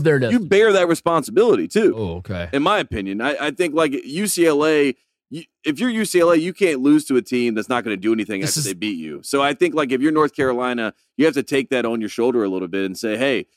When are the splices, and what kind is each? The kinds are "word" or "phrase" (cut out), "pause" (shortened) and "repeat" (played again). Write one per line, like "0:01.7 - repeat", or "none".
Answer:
none